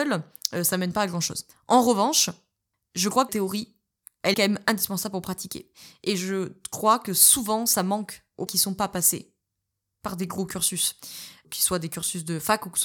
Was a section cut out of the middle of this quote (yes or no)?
yes